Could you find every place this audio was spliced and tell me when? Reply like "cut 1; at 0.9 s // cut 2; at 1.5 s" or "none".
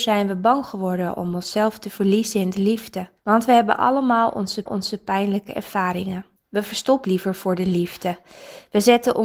cut 1; at 3.2 s // cut 2; at 4.7 s // cut 3; at 6.4 s // cut 4; at 7.0 s